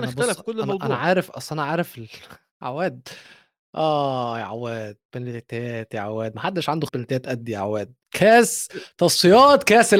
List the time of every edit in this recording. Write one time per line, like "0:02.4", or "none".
0:02.5
0:05.1
0:06.9
0:08.0